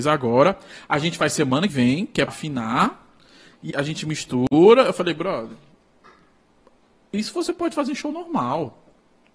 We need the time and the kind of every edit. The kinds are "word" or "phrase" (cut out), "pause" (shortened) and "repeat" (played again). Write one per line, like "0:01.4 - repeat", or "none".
0:01.7 - word
0:02.3 - word
0:03.7 - word